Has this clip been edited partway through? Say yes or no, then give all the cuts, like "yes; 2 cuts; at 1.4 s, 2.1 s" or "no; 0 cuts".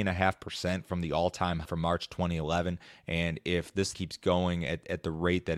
yes; 2 cuts; at 1.6 s, 3.9 s